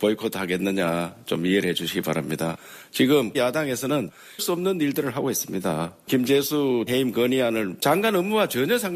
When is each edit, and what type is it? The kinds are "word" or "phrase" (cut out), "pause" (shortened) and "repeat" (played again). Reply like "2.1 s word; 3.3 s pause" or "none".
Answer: 3.3 s word; 4.4 s word; 6.9 s word; 7.8 s word